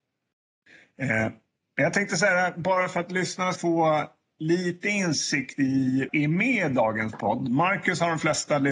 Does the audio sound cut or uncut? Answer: cut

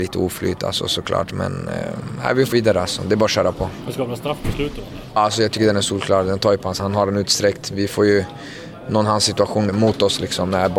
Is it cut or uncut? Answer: cut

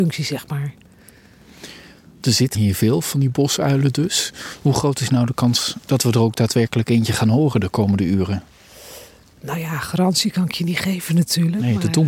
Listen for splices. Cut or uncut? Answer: cut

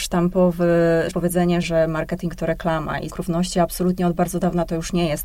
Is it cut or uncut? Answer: cut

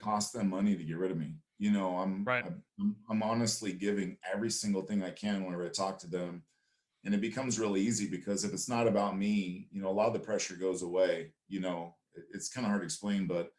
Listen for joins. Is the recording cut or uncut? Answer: cut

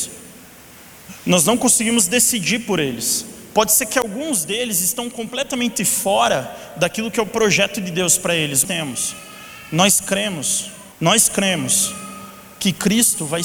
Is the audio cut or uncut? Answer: cut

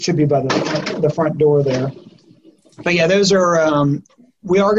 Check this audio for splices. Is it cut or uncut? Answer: uncut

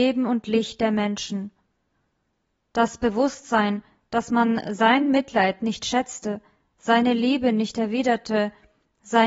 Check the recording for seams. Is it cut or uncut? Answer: uncut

